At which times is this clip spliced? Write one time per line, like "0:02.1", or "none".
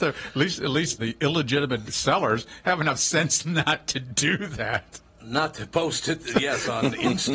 0:01.0
0:01.9
0:05.1